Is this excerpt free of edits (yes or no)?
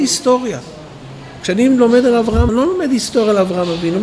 no